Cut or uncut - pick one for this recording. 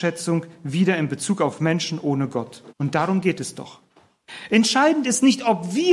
cut